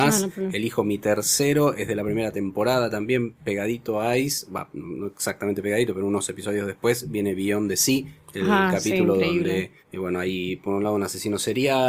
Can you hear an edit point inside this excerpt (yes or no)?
yes